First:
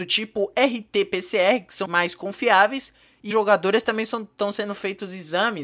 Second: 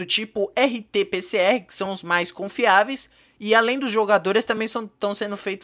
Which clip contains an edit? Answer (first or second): first